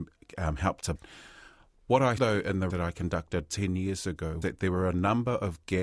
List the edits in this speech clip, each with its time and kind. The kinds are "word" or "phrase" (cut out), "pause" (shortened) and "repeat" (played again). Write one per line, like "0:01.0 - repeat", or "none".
0:00.9 - word
0:02.2 - word
0:02.7 - word
0:03.5 - word
0:04.4 - word